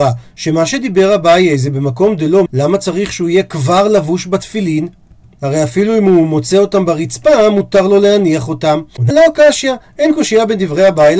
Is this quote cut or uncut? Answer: cut